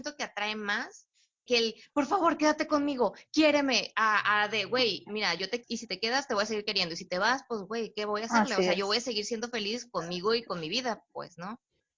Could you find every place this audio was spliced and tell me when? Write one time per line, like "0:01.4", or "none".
0:01.5
0:05.6

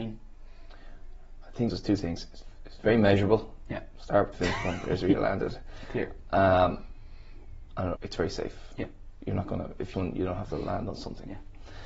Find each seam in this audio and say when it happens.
0:01.7
0:04.3
0:08.0
0:09.9

